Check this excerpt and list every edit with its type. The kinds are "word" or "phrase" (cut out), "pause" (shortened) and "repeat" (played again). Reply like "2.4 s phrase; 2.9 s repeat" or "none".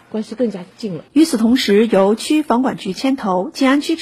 1.1 s pause